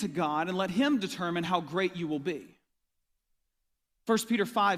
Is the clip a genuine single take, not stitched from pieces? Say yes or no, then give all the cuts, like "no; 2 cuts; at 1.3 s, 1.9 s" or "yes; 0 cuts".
yes; 0 cuts